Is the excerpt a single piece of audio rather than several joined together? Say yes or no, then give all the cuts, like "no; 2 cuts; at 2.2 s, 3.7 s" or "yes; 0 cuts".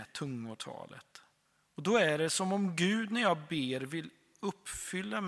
yes; 0 cuts